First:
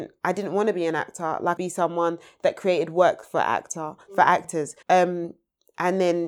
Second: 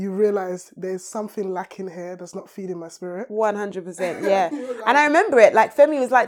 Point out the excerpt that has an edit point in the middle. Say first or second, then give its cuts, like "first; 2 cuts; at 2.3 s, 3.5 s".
first; 2 cuts; at 1.6 s, 4.8 s